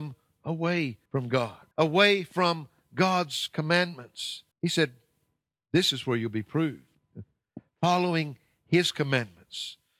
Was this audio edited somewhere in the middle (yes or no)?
yes